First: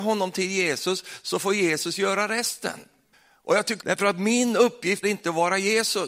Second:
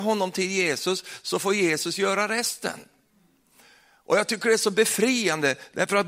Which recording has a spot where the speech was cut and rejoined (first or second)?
first